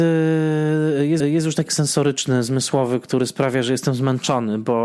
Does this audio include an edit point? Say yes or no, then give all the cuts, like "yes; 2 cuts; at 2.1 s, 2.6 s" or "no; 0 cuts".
yes; 2 cuts; at 1.2 s, 1.7 s